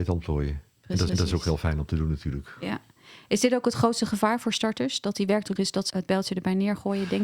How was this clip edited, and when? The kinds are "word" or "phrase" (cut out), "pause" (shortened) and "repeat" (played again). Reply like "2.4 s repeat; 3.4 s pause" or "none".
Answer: 1.1 s repeat; 5.6 s phrase; 5.9 s word